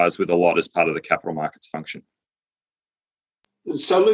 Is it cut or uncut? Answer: uncut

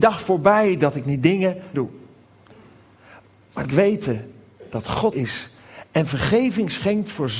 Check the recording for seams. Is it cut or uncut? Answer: cut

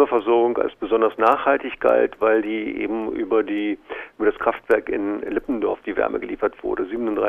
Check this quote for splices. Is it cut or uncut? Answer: uncut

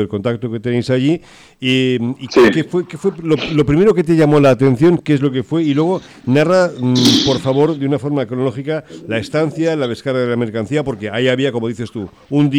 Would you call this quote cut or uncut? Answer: uncut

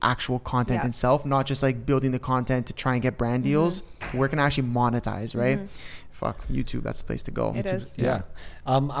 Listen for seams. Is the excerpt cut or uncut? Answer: uncut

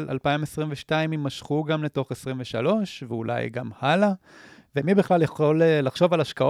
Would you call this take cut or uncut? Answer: uncut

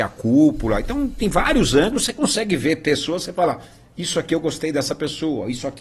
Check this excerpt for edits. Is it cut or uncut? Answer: uncut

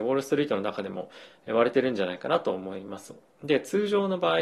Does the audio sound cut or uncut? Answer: uncut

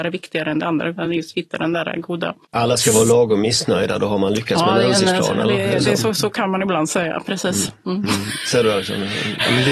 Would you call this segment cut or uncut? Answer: uncut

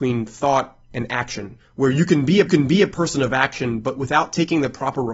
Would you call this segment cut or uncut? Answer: cut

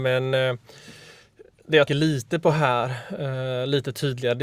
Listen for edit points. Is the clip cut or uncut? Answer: cut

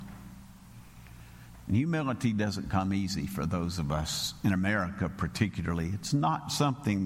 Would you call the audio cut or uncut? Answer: uncut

